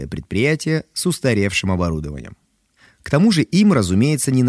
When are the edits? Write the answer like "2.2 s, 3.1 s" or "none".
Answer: none